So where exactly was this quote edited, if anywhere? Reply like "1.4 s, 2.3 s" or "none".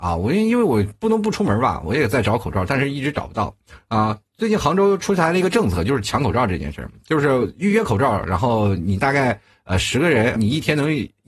10.4 s

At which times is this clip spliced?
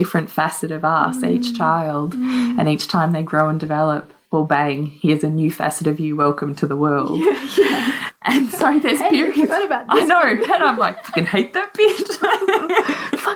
none

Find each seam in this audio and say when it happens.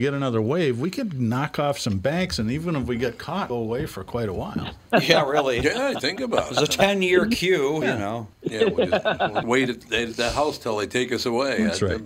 3.5 s, 7.8 s, 8.3 s, 9.4 s

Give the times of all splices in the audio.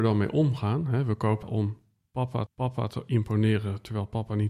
1.4 s, 2.5 s

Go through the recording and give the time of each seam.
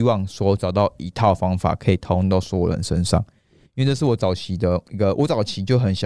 none

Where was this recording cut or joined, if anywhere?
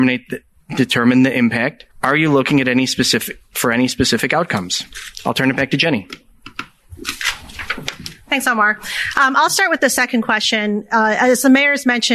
1.9 s

